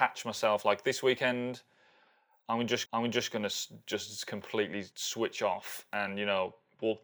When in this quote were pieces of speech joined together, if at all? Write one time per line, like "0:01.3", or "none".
0:02.9
0:04.9

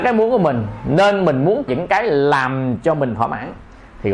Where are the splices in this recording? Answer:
0:01.7

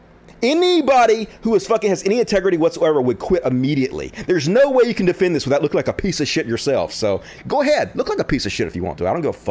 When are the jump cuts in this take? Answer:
none

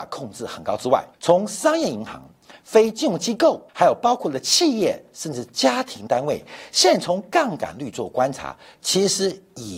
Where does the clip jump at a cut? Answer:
0:01.1
0:03.7

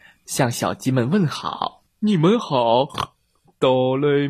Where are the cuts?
0:01.9

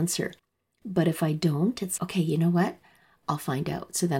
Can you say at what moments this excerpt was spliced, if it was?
0:02.0

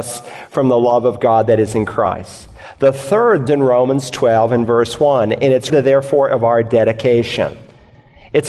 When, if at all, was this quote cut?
0:03.5
0:05.7

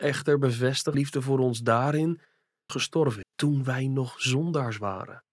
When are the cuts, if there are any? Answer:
0:00.9
0:02.7
0:03.2

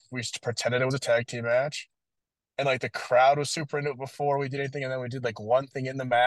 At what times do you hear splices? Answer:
none

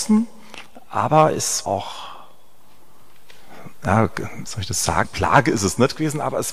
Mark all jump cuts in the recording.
0:01.6
0:04.5
0:05.0

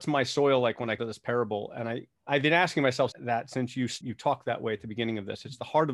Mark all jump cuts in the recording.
0:01.0
0:02.2
0:03.1
0:04.0

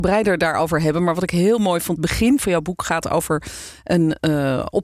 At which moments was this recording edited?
0:02.0

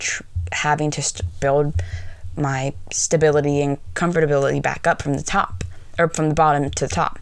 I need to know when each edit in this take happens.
none

